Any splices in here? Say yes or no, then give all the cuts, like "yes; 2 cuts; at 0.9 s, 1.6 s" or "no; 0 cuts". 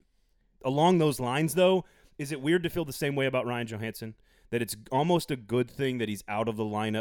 no; 0 cuts